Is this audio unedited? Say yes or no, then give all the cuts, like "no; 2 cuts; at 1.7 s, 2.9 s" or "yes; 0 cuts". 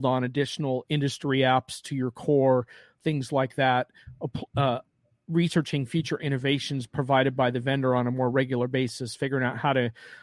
yes; 0 cuts